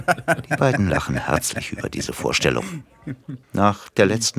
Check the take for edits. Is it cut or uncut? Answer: cut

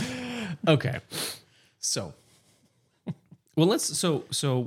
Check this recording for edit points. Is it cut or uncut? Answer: uncut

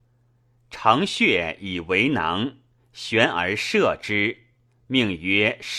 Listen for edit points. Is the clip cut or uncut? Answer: uncut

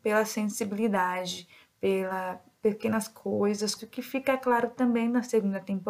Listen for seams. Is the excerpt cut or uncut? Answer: cut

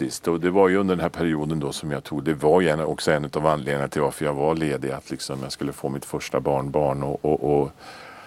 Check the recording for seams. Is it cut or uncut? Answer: uncut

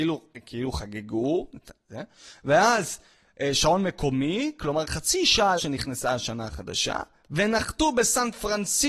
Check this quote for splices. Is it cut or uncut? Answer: cut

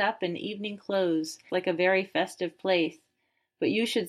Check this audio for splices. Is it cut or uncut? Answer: cut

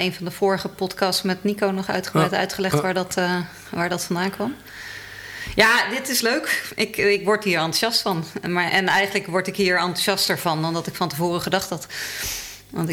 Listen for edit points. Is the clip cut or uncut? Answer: uncut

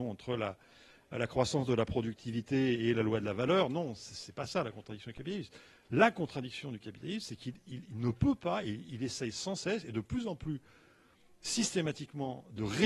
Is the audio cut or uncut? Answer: uncut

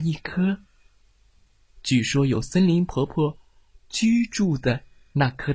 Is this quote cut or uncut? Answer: uncut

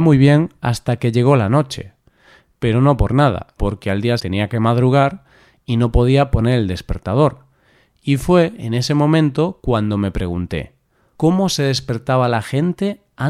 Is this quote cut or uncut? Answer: cut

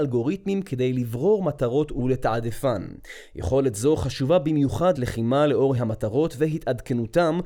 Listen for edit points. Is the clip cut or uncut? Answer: cut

